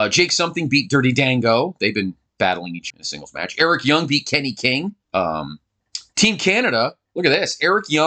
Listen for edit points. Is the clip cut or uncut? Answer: cut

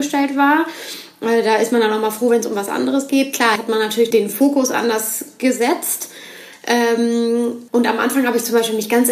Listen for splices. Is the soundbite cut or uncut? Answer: cut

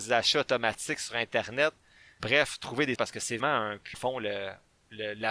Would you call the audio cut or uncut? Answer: cut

